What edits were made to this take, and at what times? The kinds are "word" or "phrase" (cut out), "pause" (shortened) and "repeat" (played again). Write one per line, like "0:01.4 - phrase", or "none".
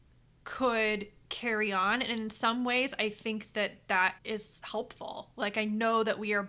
0:04.2 - pause